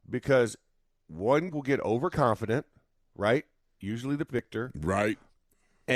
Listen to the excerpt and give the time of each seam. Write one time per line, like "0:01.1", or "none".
0:01.5
0:04.3